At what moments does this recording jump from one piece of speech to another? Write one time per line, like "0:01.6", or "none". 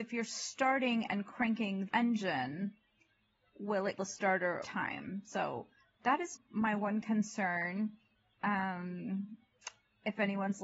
0:01.9
0:04.0
0:04.6
0:06.3